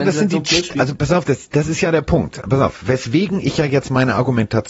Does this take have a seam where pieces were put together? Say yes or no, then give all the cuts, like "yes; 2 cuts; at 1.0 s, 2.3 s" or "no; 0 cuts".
no; 0 cuts